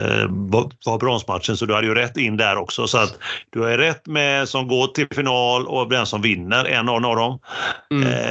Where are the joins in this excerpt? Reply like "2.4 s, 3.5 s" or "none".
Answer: 7.0 s